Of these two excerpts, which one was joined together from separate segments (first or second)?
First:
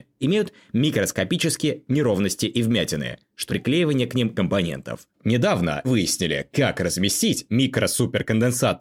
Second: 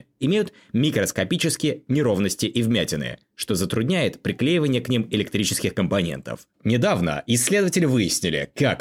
first